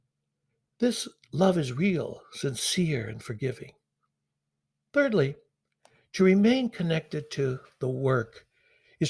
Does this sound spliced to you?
no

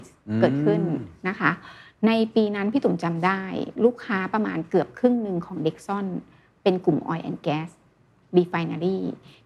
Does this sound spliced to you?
no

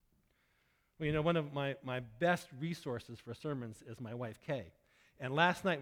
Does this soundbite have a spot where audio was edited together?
no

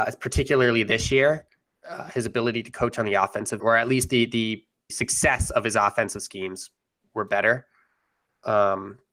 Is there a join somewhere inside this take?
yes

